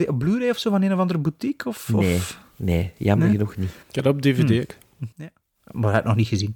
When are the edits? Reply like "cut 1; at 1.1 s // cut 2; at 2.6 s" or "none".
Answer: cut 1; at 3.8 s // cut 2; at 5.1 s